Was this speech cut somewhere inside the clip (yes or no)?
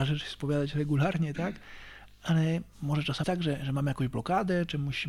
yes